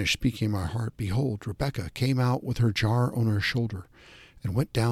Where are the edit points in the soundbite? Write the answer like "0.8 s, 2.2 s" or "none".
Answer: none